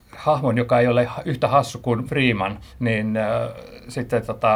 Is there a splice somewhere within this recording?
yes; 2 cuts; at 2.1 s, 2.7 s

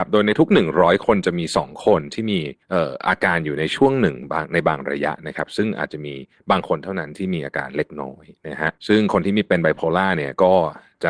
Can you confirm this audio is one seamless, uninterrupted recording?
no; 2 cuts; at 2.6 s, 8.8 s

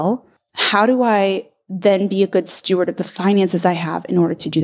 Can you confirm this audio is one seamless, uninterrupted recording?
yes; 0 cuts

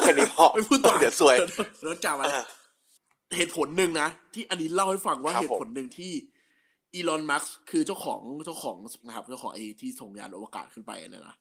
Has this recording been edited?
yes; 1 cut; at 9.0 s

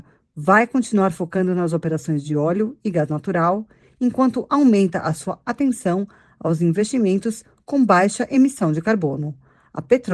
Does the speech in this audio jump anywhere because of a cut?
no; 0 cuts

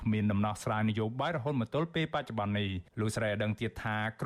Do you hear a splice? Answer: yes; 1 cut; at 2.9 s

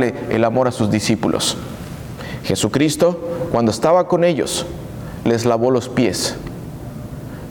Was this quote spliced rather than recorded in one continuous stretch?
no; 0 cuts

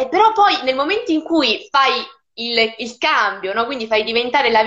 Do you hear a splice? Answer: no; 0 cuts

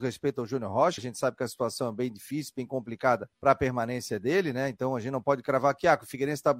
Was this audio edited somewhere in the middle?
yes; 2 cuts; at 1.0 s, 3.3 s

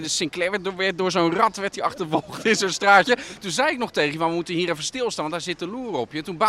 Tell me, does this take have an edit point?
no; 0 cuts

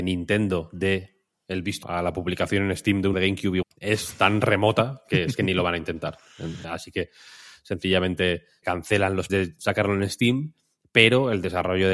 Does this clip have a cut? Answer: yes; 6 cuts; at 1.8 s, 3.1 s, 3.6 s, 6.6 s, 8.6 s, 9.3 s

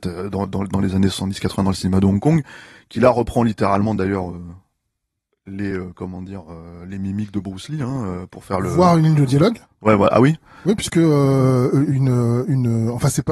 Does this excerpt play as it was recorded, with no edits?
yes; 0 cuts

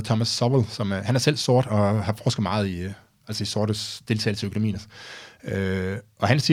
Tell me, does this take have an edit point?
no; 0 cuts

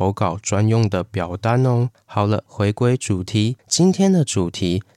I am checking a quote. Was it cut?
no; 0 cuts

